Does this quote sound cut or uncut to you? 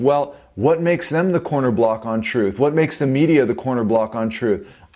uncut